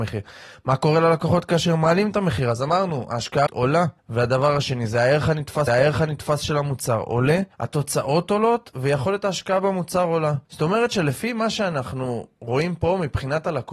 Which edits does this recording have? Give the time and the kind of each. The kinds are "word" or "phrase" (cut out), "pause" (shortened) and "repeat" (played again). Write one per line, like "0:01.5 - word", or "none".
0:03.5 - word
0:04.0 - pause
0:05.7 - repeat
0:07.5 - pause
0:10.4 - pause